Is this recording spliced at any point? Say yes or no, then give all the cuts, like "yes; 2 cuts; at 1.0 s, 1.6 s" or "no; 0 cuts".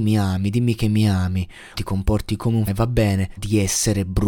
yes; 3 cuts; at 1.7 s, 2.7 s, 3.4 s